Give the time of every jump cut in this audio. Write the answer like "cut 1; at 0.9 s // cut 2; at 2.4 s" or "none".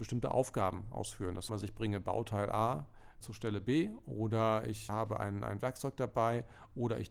cut 1; at 1.5 s // cut 2; at 3.2 s // cut 3; at 4.9 s